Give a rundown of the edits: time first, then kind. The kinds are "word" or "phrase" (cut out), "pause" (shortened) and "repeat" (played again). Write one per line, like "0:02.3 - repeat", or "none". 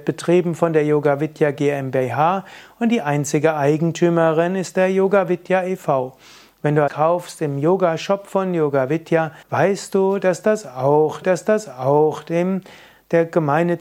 0:06.9 - phrase
0:09.4 - pause
0:11.2 - repeat